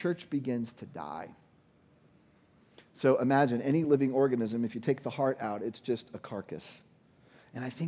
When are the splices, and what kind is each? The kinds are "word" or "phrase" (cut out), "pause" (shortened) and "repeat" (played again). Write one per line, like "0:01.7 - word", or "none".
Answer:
none